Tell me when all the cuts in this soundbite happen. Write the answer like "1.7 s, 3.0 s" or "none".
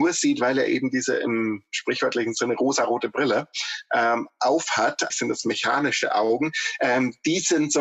5.1 s